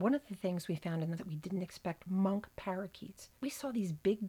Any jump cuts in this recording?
yes; 3 cuts; at 1.2 s, 2.1 s, 3.4 s

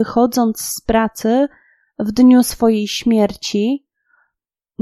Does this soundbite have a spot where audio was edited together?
no; 0 cuts

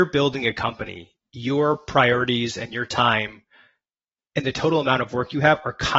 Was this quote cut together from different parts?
no; 0 cuts

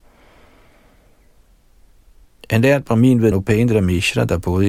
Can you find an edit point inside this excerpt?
yes; 1 cut; at 3.3 s

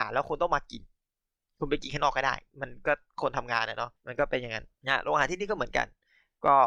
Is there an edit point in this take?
yes; 3 cuts; at 2.5 s, 4.0 s, 4.7 s

